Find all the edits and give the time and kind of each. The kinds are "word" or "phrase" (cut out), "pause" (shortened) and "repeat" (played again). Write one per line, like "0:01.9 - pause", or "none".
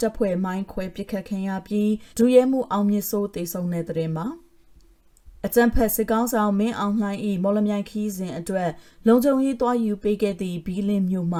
0:02.1 - pause

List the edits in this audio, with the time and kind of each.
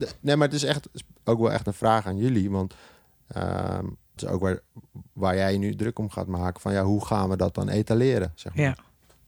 0:04.2 - word

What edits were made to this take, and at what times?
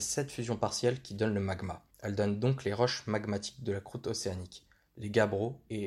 0:01.9 - pause

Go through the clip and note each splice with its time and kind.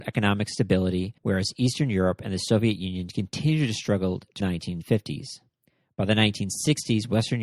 0:01.2 - pause
0:04.4 - phrase

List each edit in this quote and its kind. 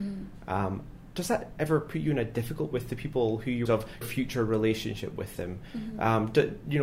0:02.7 - word
0:03.7 - phrase
0:04.0 - word

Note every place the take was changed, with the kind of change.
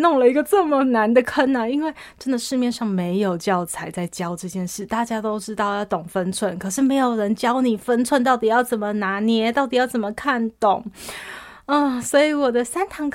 none

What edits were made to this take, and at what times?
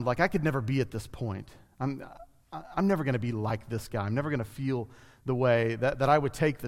none

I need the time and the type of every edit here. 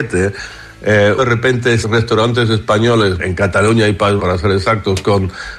0:01.2 - word
0:01.8 - word
0:03.2 - word
0:04.2 - word

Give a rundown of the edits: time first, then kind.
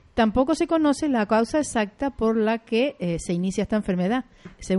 none

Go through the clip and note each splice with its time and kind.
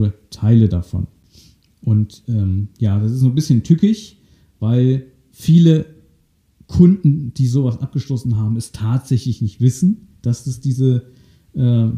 none

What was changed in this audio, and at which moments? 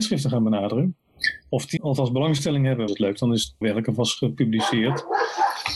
0:01.8 - word
0:02.9 - phrase
0:03.6 - word

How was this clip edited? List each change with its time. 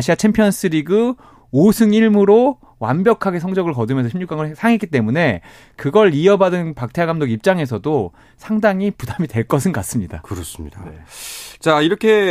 none

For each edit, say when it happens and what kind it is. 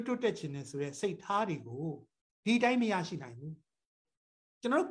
0:02.3 - pause

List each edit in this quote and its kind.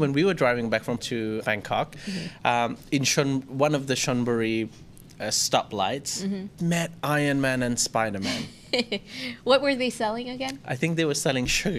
0:01.0 - word
0:01.4 - word
0:06.6 - word

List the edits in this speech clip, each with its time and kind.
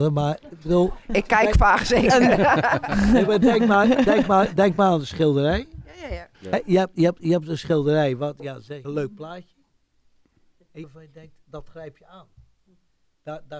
0:06.3 - pause
0:08.8 - phrase
0:10.8 - phrase

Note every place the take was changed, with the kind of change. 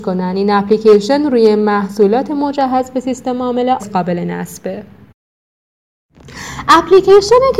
0:03.8 - word

